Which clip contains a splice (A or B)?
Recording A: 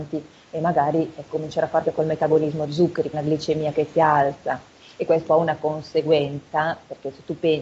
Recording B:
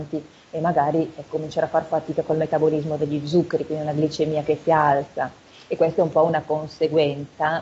A